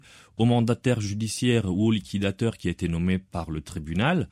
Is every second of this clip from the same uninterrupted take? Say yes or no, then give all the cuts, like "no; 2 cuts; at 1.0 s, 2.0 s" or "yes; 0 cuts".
yes; 0 cuts